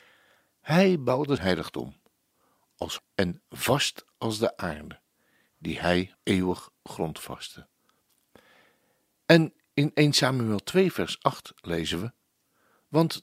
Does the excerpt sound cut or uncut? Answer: cut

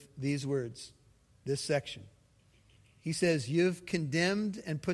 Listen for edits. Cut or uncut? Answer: uncut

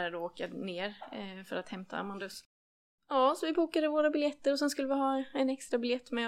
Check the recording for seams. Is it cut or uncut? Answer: uncut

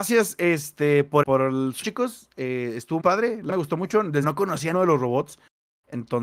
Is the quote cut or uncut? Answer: cut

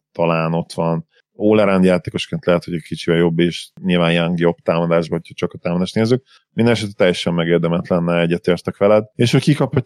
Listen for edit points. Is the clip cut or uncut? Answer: uncut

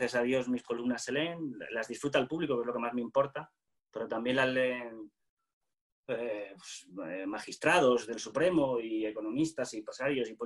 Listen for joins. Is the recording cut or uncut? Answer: uncut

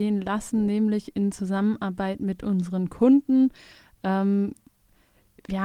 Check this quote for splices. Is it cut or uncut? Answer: uncut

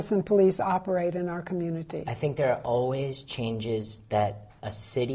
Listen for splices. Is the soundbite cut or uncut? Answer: uncut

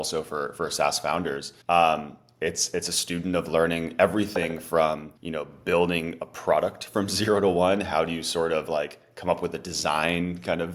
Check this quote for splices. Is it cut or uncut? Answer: cut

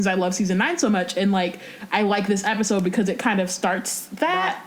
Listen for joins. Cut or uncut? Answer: uncut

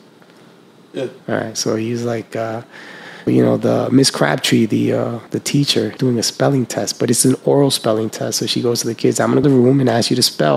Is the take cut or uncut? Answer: cut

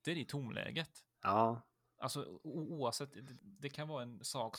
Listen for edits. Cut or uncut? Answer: cut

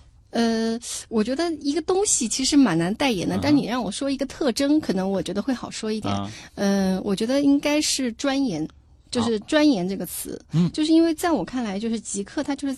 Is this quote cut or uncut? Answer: uncut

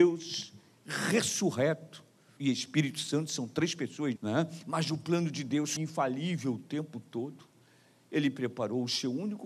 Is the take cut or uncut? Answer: cut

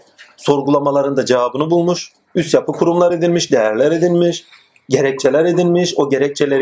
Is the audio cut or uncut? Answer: uncut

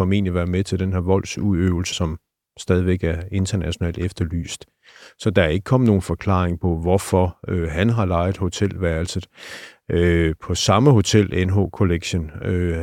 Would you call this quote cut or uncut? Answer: cut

